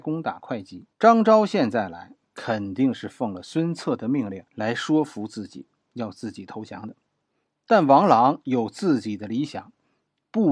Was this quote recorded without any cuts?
no; 2 cuts; at 0.9 s, 4.5 s

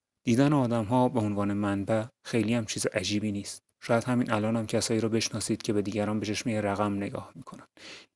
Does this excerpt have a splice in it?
no; 0 cuts

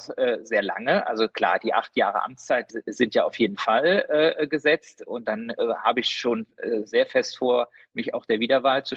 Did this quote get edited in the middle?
yes; 1 cut; at 2.7 s

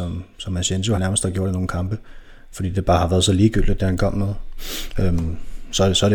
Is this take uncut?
no; 1 cut; at 1.0 s

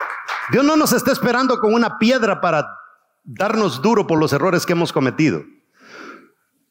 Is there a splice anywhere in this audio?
no; 0 cuts

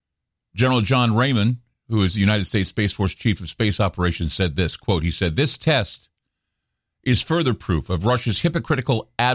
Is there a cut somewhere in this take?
no; 0 cuts

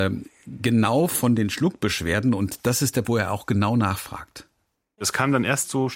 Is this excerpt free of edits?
no; 1 cut; at 3.0 s

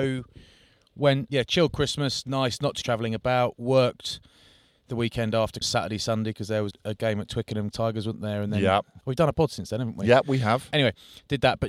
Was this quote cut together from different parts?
yes; 6 cuts; at 1.3 s, 2.8 s, 5.6 s, 6.7 s, 7.7 s, 9.0 s

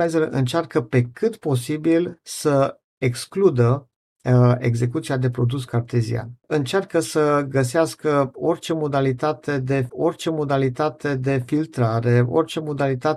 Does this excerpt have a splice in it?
yes; 2 cuts; at 2.9 s, 9.9 s

